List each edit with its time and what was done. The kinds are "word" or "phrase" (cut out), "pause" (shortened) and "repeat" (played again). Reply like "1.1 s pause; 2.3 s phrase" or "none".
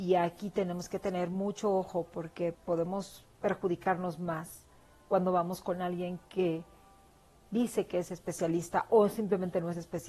2.5 s word